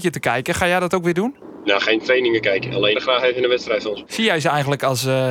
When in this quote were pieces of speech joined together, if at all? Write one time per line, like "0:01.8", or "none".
0:02.9